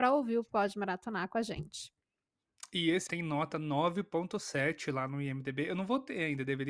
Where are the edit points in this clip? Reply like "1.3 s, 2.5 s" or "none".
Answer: 3.1 s